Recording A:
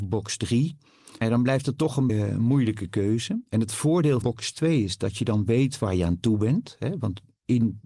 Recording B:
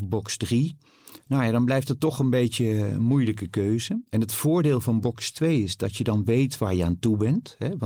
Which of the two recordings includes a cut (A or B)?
A